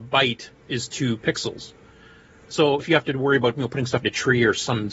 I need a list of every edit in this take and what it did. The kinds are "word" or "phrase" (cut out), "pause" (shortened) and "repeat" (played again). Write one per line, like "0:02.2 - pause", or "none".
0:02.8 - word
0:04.0 - word